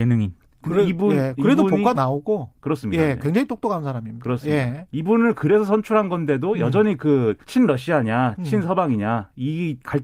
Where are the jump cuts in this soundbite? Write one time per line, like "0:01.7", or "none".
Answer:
0:01.9
0:07.4

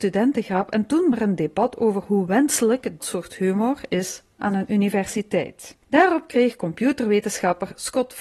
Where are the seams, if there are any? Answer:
0:01.1
0:03.0
0:05.8

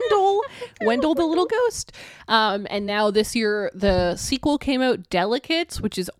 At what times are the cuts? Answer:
none

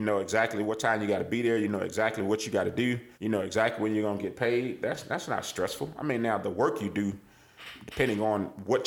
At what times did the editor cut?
0:03.1

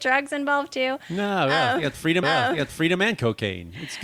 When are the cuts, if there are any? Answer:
0:02.2

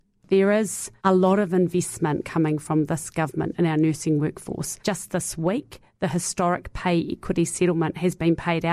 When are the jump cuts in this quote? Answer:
0:01.0
0:04.8

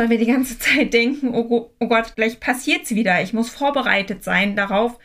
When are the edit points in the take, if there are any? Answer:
0:02.1

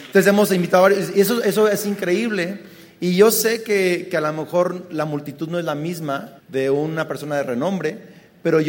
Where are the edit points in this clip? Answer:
0:06.4

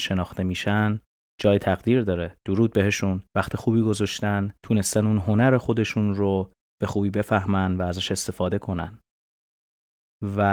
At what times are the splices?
0:01.1
0:03.3
0:04.6

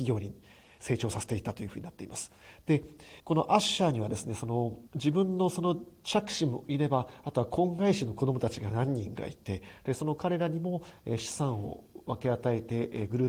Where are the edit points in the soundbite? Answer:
0:03.2
0:04.9

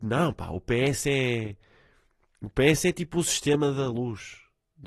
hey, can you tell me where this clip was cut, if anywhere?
none

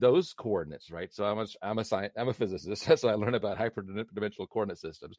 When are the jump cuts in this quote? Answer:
none

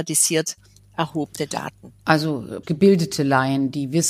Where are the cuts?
0:02.6

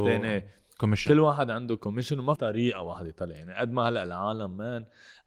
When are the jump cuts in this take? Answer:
0:02.4

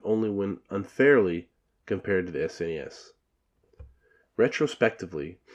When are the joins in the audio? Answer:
none

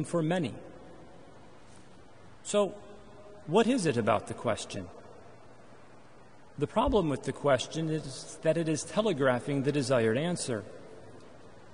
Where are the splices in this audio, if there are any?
none

